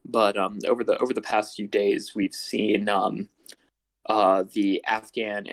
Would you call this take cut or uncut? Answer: uncut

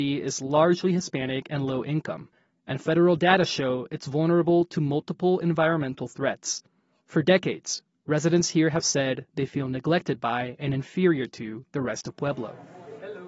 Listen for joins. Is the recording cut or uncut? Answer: uncut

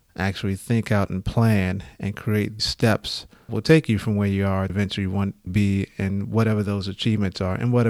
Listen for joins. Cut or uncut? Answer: cut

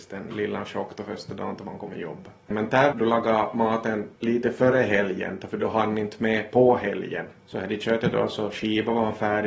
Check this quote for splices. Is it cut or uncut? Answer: cut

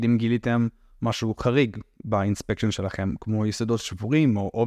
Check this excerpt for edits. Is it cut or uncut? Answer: uncut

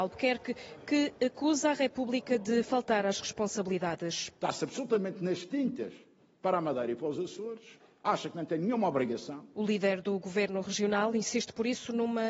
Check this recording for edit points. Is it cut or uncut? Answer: uncut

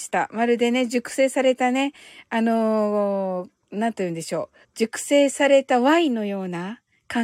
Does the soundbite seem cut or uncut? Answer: cut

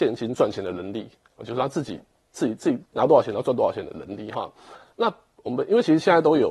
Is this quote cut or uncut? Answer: uncut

